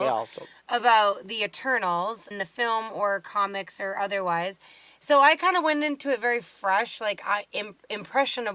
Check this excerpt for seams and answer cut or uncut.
cut